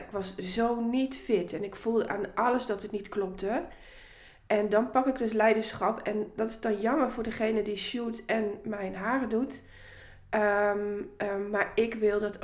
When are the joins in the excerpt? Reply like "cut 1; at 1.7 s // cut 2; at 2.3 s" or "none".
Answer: none

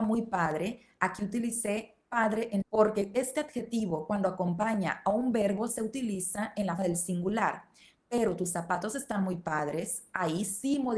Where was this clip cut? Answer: cut 1; at 2.6 s // cut 2; at 6.8 s

